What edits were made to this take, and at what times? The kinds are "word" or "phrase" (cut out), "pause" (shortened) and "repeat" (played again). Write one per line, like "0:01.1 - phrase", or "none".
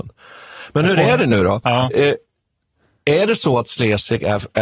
none